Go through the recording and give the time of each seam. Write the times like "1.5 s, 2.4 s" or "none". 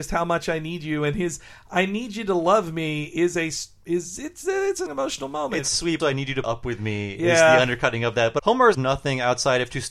4.9 s, 6.0 s, 6.4 s, 8.4 s, 8.7 s